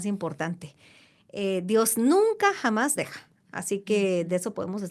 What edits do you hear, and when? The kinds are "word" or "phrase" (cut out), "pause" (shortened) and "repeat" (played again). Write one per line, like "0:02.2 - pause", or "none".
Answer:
0:03.0 - word

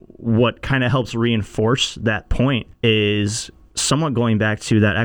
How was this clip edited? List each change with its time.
0:02.7 - pause

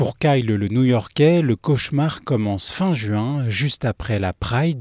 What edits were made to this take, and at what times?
none

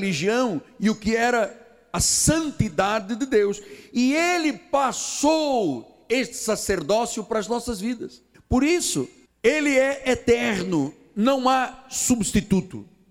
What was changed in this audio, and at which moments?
0:08.3 - pause
0:09.3 - pause

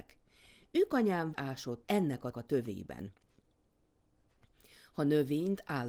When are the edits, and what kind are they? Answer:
0:01.3 - word
0:01.8 - word
0:02.3 - word

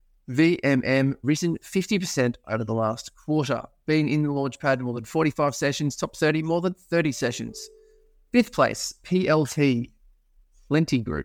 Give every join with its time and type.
0:01.2 - word

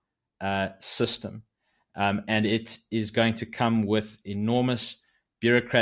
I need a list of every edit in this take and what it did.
none

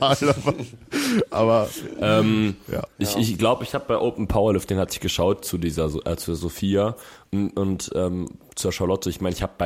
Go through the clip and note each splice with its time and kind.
none

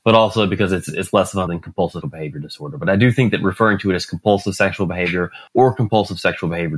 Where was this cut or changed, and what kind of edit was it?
0:01.5 - word
0:02.0 - word
0:05.5 - pause

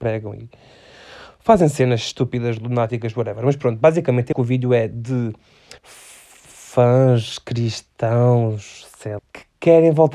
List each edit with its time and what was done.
0:04.3 - word
0:05.8 - pause
0:09.2 - word

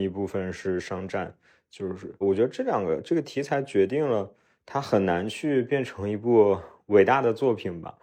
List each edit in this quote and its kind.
0:02.2 - word

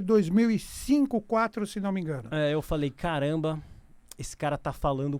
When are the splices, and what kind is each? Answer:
none

